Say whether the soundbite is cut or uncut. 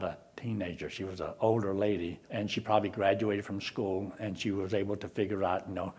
cut